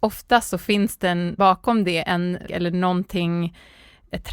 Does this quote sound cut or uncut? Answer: cut